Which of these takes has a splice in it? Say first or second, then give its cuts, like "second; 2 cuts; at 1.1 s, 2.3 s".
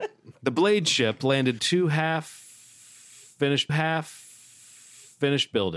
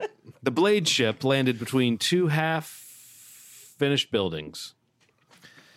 first; 2 cuts; at 1.6 s, 3.7 s